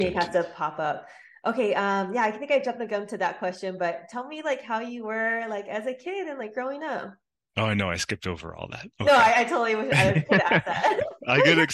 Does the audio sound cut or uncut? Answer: uncut